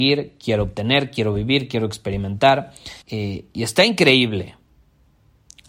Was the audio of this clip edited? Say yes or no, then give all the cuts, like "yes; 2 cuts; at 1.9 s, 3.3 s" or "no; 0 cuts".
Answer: yes; 1 cut; at 3.0 s